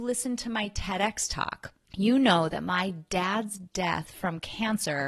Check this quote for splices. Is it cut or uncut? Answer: cut